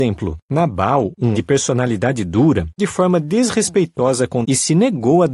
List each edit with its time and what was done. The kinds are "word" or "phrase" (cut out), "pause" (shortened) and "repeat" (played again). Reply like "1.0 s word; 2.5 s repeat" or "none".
1.3 s word; 2.8 s word; 4.4 s word